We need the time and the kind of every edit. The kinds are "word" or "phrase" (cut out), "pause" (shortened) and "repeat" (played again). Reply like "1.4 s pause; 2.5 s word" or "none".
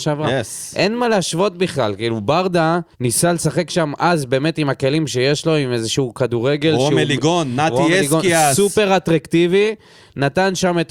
2.9 s pause